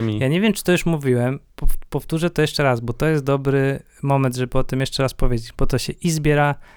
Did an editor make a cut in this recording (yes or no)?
no